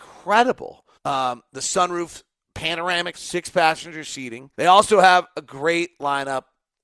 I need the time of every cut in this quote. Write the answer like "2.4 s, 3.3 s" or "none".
0.9 s, 3.1 s, 4.5 s